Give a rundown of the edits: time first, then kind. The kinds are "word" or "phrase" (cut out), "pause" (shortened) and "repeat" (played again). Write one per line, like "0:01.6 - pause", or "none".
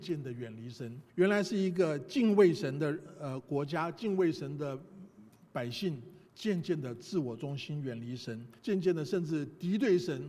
0:01.1 - pause
0:06.3 - pause
0:08.6 - pause